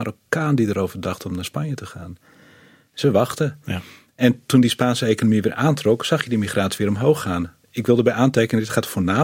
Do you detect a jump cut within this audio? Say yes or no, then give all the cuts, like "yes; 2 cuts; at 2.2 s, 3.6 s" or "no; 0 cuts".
no; 0 cuts